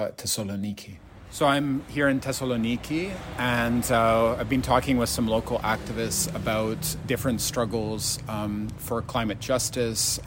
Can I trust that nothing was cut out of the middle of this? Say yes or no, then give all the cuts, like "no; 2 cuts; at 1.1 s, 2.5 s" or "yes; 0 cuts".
yes; 0 cuts